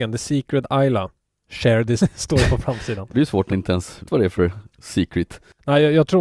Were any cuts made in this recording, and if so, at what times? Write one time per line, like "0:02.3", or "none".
0:02.0
0:03.1
0:03.5
0:04.1